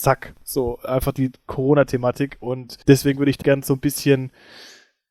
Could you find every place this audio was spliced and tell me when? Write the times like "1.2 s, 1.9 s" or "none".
2.8 s, 3.4 s

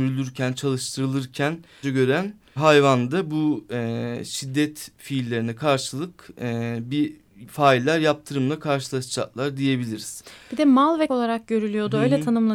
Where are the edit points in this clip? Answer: 1.8 s, 2.6 s, 11.1 s

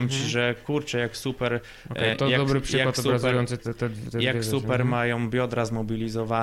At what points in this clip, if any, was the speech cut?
2.1 s, 3.6 s

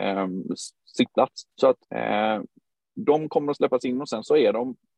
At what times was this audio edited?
1.5 s, 1.8 s

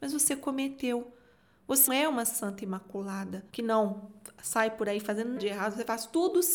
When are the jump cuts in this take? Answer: 1.9 s, 3.5 s, 5.4 s

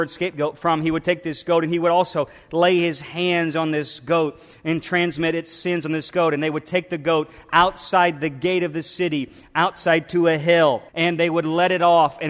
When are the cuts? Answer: 10.9 s

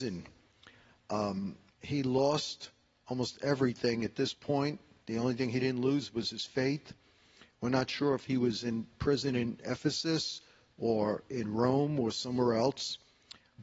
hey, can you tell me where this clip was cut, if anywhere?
none

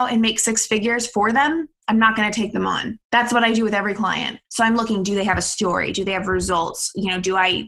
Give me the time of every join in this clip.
3.0 s, 4.4 s

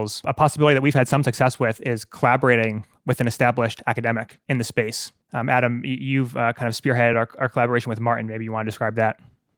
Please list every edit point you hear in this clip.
none

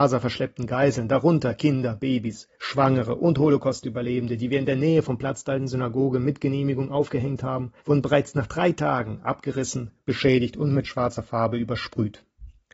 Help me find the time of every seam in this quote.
2.5 s, 7.8 s

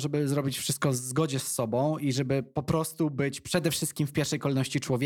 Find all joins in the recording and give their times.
none

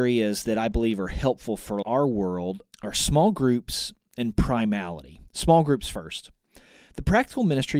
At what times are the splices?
1.8 s, 2.7 s, 5.3 s

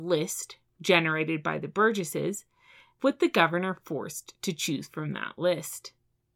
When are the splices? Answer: none

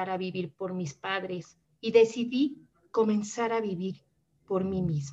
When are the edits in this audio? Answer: 1.6 s

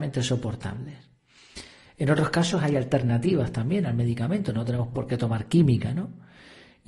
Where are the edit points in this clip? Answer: none

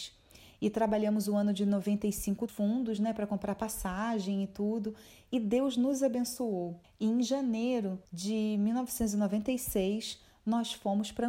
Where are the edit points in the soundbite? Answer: 2.5 s, 6.8 s, 8.0 s

